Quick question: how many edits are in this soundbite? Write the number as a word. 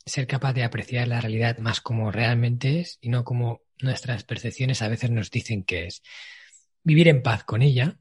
one